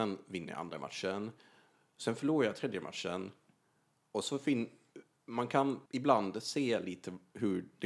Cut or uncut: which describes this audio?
cut